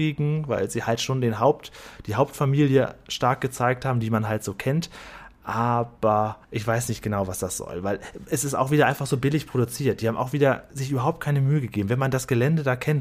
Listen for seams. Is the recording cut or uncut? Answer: cut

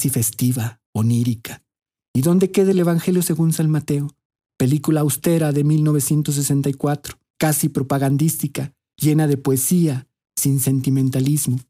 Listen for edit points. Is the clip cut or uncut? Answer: uncut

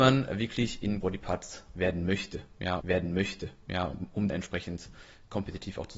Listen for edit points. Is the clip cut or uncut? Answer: cut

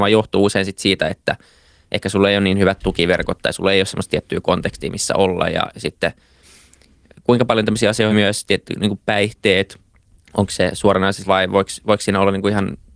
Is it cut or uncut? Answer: cut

